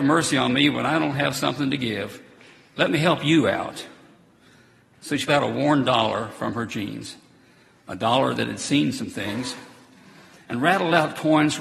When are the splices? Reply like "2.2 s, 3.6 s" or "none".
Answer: 5.3 s